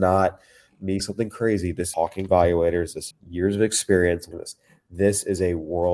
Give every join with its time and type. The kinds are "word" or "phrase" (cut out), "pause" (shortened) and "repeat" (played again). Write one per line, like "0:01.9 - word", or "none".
0:01.0 - word
0:01.9 - word
0:02.3 - word
0:03.1 - word
0:04.3 - word